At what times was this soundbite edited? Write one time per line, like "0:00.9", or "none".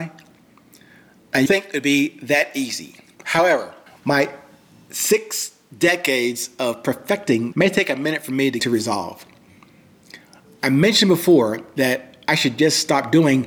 0:01.5
0:03.9
0:07.5
0:08.6